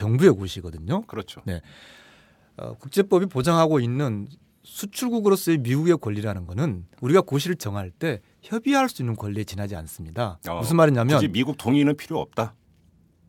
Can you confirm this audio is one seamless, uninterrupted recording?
yes; 0 cuts

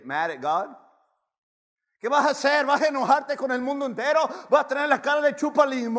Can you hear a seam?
no; 0 cuts

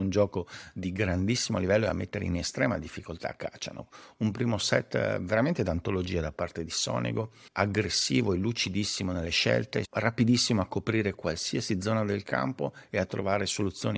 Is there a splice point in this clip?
no; 0 cuts

